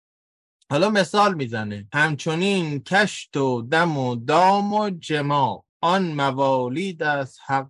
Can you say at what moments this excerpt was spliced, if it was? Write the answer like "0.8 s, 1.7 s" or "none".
none